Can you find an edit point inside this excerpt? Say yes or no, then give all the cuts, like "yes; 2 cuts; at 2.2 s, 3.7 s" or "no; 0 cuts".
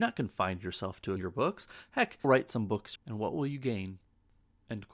yes; 3 cuts; at 1.2 s, 2.2 s, 3.0 s